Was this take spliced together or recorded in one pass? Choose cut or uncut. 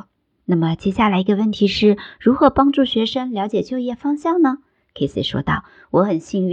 uncut